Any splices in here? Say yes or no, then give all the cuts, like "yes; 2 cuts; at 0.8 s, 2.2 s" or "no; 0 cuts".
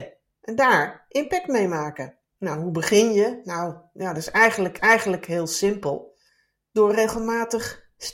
yes; 3 cuts; at 2.3 s, 4.8 s, 6.3 s